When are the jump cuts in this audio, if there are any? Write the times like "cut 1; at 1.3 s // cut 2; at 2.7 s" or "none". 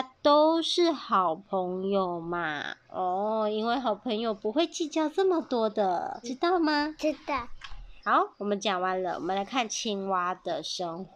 cut 1; at 6.2 s // cut 2; at 8.0 s